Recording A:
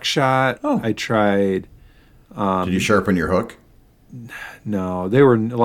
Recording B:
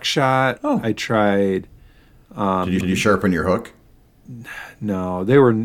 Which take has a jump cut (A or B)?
B